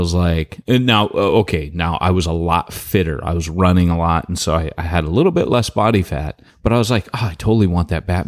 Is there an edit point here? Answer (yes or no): yes